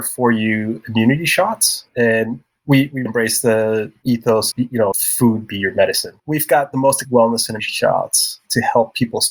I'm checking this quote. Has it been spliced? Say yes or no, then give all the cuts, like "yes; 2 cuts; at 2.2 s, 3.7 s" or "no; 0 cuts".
yes; 7 cuts; at 1.9 s, 3.1 s, 4.5 s, 4.9 s, 6.2 s, 7.0 s, 7.6 s